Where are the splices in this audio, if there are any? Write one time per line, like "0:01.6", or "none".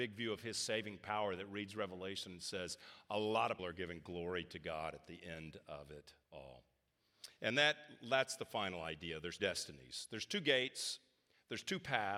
0:03.6
0:06.2
0:09.4